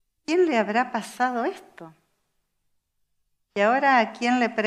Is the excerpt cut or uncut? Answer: uncut